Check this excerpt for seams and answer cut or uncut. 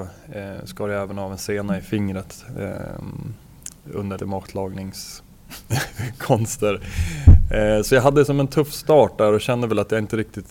cut